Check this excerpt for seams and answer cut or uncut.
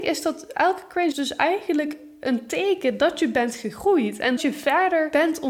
cut